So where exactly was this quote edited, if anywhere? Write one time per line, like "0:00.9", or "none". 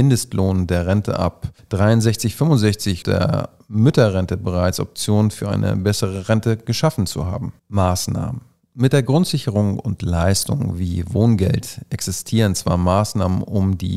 0:03.0
0:07.6